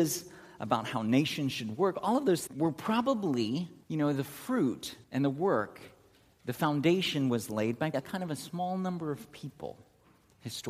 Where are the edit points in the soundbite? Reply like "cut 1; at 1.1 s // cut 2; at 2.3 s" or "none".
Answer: cut 1; at 2.5 s // cut 2; at 3.8 s // cut 3; at 5.0 s // cut 4; at 7.9 s